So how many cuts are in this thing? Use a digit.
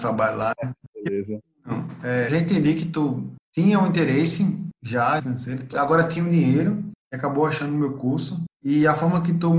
3